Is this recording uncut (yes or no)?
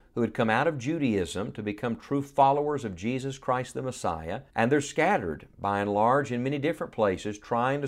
no